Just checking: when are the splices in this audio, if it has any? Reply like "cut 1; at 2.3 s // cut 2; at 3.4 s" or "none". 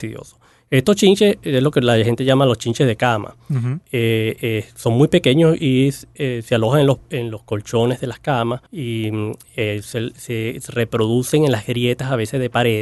cut 1; at 8.7 s